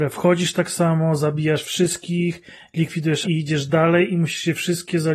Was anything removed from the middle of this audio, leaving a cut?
yes; 1 cut; at 3.2 s

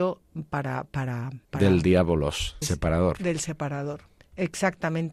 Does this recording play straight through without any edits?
no; 3 cuts; at 1.4 s, 2.6 s, 4.1 s

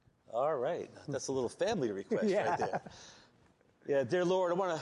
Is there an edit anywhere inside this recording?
no; 0 cuts

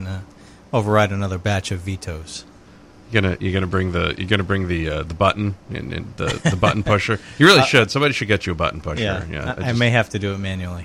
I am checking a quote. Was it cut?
no; 0 cuts

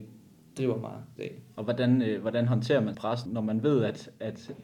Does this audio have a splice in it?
yes; 3 cuts; at 1.2 s, 2.9 s, 3.3 s

